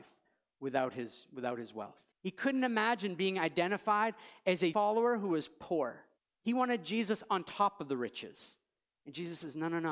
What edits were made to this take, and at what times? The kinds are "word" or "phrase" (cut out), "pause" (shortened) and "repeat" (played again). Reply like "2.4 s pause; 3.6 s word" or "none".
2.1 s pause; 4.7 s word; 6.2 s pause